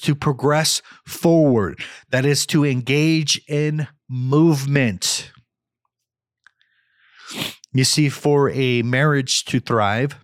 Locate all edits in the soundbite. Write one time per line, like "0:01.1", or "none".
none